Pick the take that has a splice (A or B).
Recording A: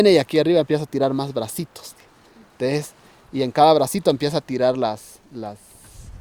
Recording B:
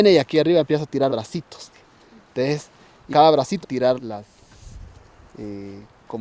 B